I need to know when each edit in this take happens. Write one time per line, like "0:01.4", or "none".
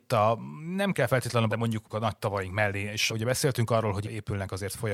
0:01.5
0:03.1